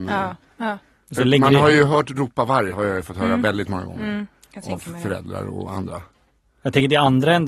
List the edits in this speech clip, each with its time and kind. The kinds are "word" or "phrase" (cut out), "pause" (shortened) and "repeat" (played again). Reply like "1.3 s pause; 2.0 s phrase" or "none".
none